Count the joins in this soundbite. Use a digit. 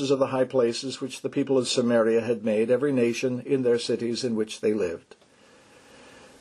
0